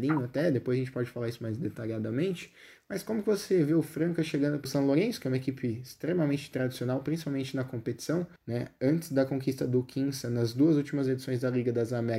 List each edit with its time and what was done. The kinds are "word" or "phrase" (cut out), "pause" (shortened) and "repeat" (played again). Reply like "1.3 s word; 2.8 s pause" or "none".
4.7 s phrase; 8.4 s pause